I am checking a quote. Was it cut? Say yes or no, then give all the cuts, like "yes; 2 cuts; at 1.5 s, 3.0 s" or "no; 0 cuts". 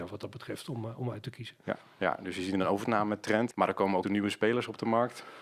yes; 1 cut; at 4.0 s